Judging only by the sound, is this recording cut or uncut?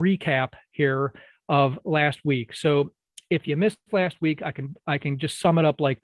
uncut